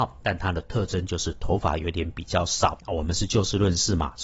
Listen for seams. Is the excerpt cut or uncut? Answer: cut